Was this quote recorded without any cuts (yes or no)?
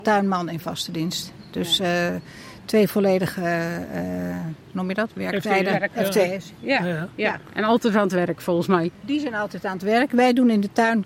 no